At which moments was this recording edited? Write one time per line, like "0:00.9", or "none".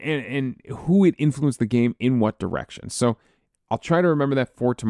none